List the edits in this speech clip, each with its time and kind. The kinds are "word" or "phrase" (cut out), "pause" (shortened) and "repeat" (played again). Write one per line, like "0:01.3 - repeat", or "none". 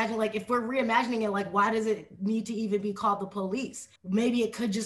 0:04.0 - pause